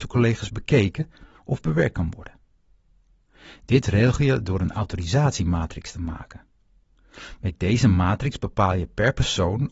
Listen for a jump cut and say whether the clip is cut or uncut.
uncut